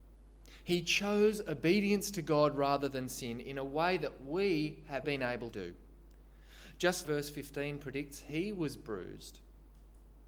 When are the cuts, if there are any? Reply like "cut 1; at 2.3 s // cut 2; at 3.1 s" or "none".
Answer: cut 1; at 5.0 s // cut 2; at 5.5 s // cut 3; at 7.0 s